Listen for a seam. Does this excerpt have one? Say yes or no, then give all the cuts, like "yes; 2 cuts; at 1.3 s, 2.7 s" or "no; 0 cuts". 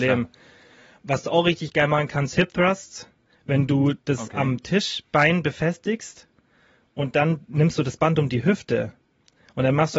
no; 0 cuts